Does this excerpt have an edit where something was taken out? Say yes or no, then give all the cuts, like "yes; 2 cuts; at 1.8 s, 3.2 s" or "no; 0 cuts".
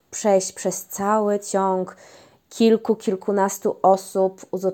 no; 0 cuts